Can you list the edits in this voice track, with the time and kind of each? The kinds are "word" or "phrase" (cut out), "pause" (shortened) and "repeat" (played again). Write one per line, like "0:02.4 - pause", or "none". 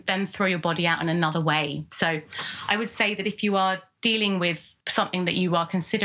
0:04.8 - pause